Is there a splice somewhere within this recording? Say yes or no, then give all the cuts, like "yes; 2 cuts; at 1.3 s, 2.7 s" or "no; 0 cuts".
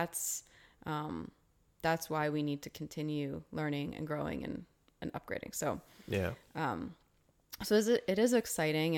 no; 0 cuts